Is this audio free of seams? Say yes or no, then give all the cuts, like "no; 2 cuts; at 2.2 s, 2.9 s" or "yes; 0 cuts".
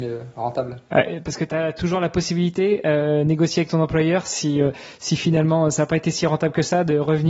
no; 1 cut; at 1.5 s